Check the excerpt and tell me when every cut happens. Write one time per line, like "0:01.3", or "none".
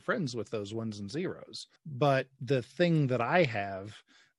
0:01.8